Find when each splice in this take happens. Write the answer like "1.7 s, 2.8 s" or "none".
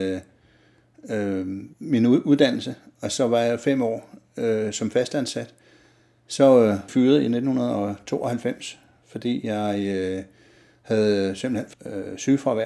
1.7 s, 6.9 s, 11.7 s